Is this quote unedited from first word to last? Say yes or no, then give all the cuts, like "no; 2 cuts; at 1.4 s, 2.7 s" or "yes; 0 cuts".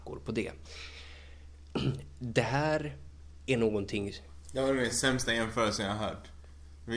yes; 0 cuts